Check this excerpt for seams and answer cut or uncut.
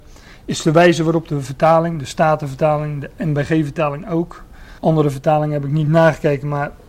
cut